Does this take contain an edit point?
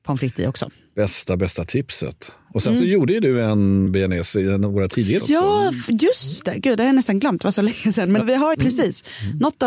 yes; 4 cuts; at 3.9 s, 5.2 s, 8.2 s, 8.5 s

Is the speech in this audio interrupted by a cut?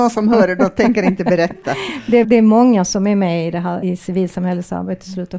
yes; 2 cuts; at 2.2 s, 3.8 s

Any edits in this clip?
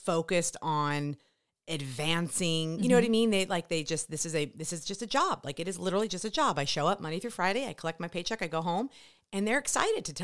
no; 0 cuts

